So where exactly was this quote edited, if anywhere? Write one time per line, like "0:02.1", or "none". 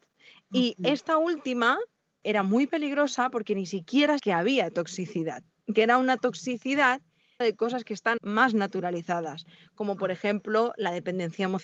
0:02.2
0:04.2
0:05.7
0:07.4
0:08.2